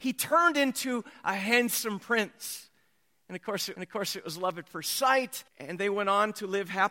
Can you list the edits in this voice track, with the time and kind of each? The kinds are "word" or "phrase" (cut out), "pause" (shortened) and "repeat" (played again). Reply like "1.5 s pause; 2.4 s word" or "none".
3.8 s repeat; 5.5 s pause